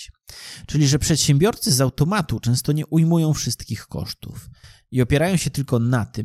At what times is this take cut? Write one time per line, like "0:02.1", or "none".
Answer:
none